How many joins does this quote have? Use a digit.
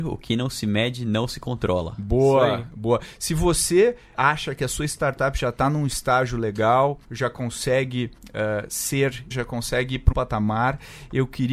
5